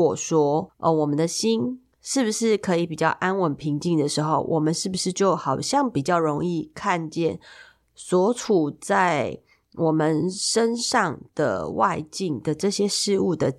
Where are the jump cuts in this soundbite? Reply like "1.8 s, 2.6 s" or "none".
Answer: none